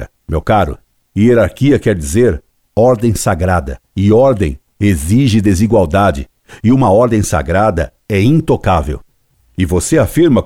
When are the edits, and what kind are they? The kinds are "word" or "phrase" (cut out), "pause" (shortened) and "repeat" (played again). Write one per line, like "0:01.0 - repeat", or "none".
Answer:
none